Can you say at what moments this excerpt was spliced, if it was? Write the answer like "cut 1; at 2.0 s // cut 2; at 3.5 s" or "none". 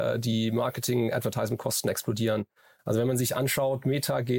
none